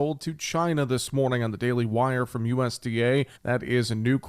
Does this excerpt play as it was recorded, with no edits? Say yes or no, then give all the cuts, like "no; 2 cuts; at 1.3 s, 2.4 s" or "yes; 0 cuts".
no; 1 cut; at 3.4 s